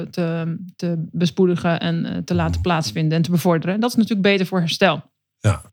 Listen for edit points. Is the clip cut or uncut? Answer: uncut